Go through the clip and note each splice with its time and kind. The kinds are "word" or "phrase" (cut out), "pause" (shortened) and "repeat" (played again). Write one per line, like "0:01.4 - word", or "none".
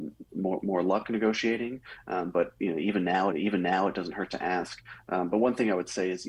0:03.3 - repeat